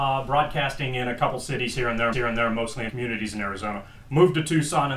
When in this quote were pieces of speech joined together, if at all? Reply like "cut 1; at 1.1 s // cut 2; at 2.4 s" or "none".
cut 1; at 2.1 s // cut 2; at 2.9 s